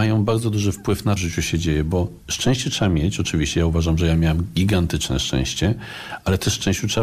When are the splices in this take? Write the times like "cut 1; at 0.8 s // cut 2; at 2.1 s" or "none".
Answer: cut 1; at 1.2 s // cut 2; at 2.2 s